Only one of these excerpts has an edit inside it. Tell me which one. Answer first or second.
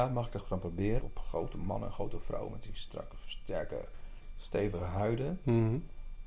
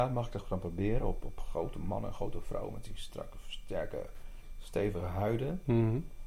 first